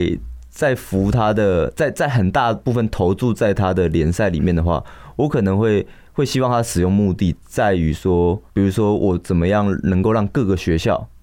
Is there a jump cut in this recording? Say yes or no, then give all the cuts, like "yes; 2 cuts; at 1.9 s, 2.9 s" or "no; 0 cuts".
yes; 1 cut; at 8.5 s